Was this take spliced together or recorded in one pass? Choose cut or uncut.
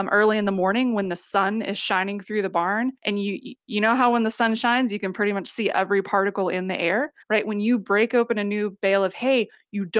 cut